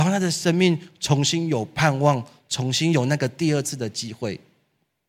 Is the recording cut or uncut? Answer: uncut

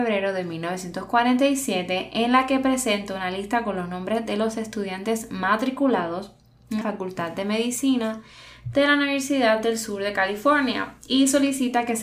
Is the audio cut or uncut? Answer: cut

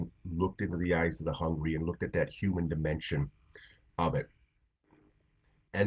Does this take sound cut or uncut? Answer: uncut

